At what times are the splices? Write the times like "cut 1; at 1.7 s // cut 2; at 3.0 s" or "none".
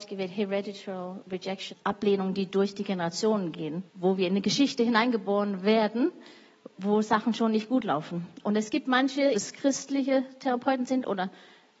cut 1; at 1.7 s // cut 2; at 3.9 s // cut 3; at 6.7 s // cut 4; at 9.3 s

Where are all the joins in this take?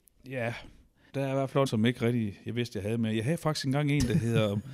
cut 1; at 1.1 s // cut 2; at 1.7 s

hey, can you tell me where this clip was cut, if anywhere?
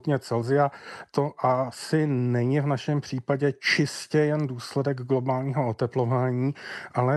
none

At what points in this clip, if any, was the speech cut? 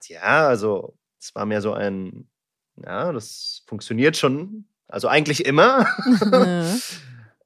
cut 1; at 1.1 s

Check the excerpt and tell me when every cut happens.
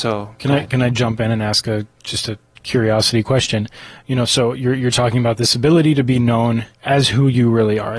cut 1; at 1.9 s // cut 2; at 6.7 s

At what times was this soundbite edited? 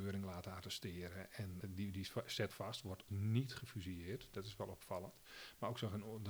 cut 1; at 1.6 s // cut 2; at 2.5 s // cut 3; at 3.1 s

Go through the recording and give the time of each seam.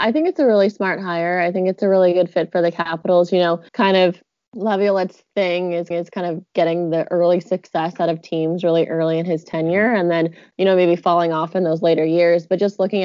cut 1; at 3.7 s // cut 2; at 4.4 s // cut 3; at 5.9 s

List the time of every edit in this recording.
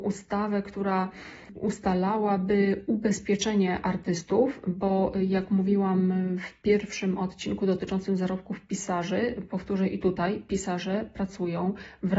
none

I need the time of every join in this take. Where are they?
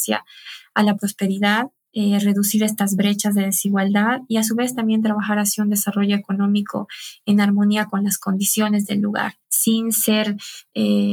cut 1; at 1.9 s // cut 2; at 9.4 s

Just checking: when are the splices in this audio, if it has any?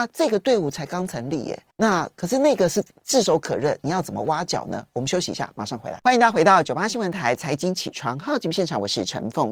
cut 1; at 1.7 s

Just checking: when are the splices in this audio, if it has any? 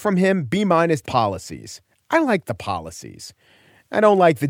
cut 1; at 1.0 s

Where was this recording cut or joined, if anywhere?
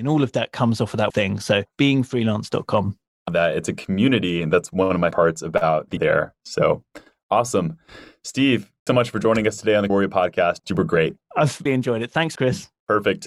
cut 1; at 1.1 s // cut 2; at 3.3 s // cut 3; at 5.1 s // cut 4; at 6.0 s // cut 5; at 8.9 s // cut 6; at 9.9 s // cut 7; at 11.7 s // cut 8; at 12.4 s

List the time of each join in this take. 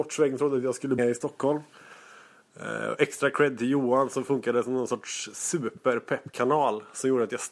cut 1; at 1.0 s

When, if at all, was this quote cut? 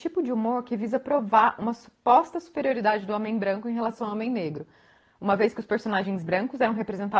none

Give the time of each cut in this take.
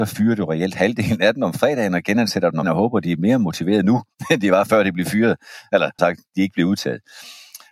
cut 1; at 2.6 s // cut 2; at 6.0 s

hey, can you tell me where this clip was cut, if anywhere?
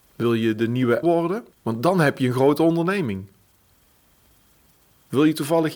cut 1; at 1.0 s // cut 2; at 1.5 s

